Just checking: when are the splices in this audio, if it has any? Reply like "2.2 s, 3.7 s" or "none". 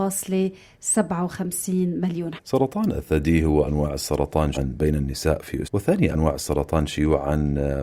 2.4 s, 3.6 s, 4.5 s, 5.6 s, 6.1 s